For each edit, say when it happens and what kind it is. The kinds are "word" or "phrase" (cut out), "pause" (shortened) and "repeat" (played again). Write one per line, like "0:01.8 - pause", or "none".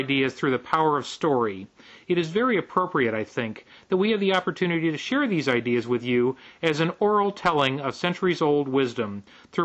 none